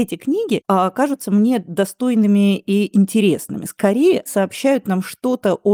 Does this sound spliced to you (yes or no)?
yes